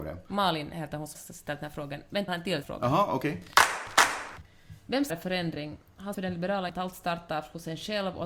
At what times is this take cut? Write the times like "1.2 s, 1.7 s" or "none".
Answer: 1.1 s, 2.3 s, 2.6 s, 5.1 s, 6.1 s, 6.7 s